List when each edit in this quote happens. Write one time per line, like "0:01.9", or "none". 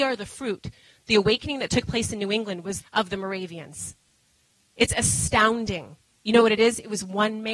0:02.8